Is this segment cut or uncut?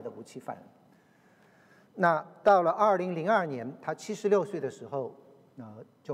uncut